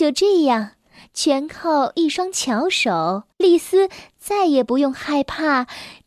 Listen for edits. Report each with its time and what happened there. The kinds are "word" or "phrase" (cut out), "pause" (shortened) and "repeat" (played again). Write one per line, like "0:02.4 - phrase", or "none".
0:03.3 - pause